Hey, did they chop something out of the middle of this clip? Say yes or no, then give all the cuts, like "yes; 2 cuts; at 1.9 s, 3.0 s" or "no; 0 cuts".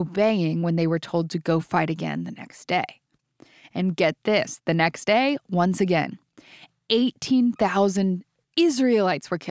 no; 0 cuts